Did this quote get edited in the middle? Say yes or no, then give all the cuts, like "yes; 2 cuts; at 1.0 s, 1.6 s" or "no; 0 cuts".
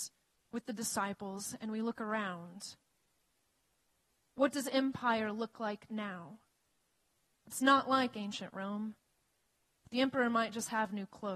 no; 0 cuts